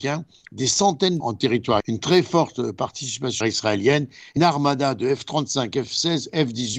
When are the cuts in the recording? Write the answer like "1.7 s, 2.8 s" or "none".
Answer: 1.2 s, 1.8 s, 3.4 s, 4.4 s